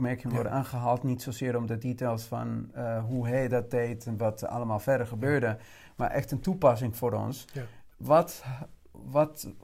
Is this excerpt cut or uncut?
cut